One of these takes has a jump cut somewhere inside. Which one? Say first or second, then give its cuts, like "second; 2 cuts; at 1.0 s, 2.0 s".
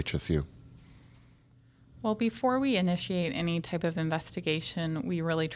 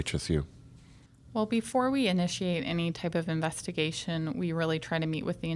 second; 1 cut; at 1.1 s